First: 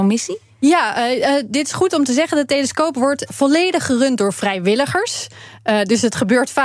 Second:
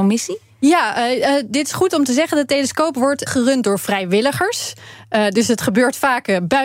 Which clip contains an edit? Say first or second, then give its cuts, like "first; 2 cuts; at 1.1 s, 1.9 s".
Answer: second; 1 cut; at 3.3 s